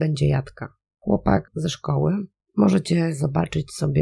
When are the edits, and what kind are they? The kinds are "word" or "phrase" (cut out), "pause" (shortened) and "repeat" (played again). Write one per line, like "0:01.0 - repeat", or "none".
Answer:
0:01.5 - word

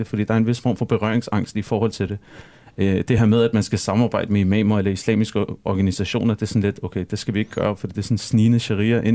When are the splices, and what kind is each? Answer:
none

